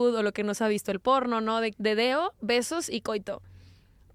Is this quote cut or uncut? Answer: cut